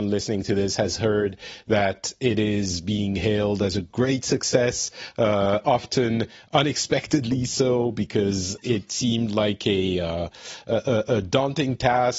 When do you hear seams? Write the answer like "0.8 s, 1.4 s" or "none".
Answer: none